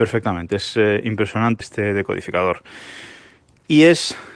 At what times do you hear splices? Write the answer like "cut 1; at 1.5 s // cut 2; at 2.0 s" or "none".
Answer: cut 1; at 1.6 s